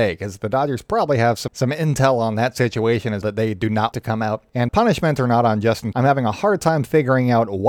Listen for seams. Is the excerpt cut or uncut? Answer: cut